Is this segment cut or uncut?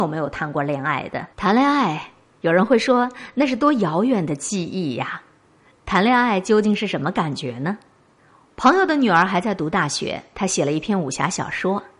cut